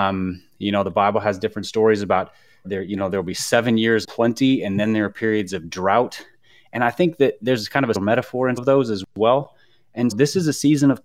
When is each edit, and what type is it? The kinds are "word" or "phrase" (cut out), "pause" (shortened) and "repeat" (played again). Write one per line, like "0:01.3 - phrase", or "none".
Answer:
0:02.6 - word
0:04.0 - word
0:07.9 - word
0:08.6 - word
0:10.1 - word